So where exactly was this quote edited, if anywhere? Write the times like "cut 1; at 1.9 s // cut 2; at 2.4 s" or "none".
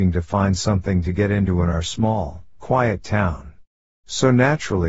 none